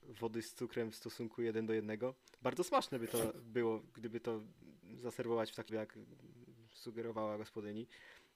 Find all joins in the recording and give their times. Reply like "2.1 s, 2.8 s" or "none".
5.7 s

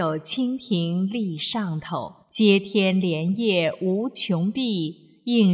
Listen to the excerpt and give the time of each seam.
2.2 s

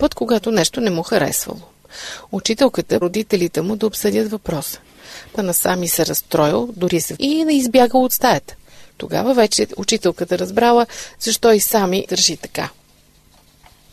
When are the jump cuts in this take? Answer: 3.0 s, 5.4 s, 7.1 s, 8.9 s, 12.1 s

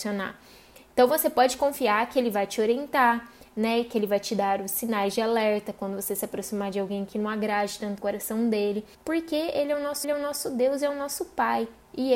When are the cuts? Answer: 8.0 s, 8.9 s, 10.0 s

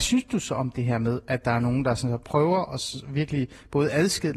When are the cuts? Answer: none

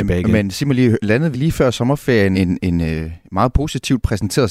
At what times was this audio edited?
1.3 s, 2.3 s

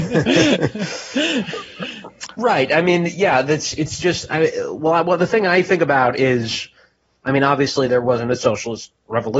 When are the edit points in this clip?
none

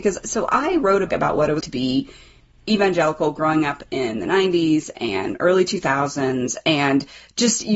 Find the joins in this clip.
1.1 s, 1.6 s

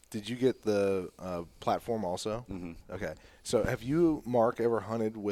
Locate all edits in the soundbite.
none

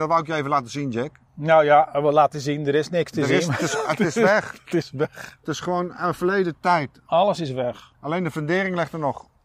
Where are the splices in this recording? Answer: 7.9 s

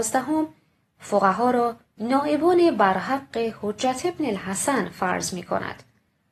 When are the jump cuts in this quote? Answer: none

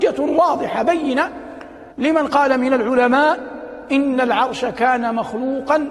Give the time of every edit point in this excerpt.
1.9 s

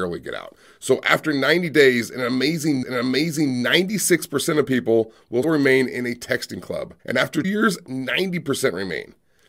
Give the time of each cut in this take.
2.8 s, 5.4 s, 7.0 s, 7.4 s

